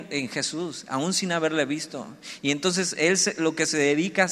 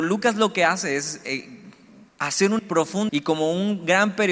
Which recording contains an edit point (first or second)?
second